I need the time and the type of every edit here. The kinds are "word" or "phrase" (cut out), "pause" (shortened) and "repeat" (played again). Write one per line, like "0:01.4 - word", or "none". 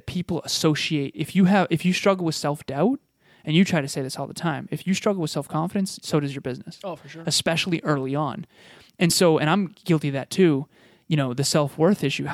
none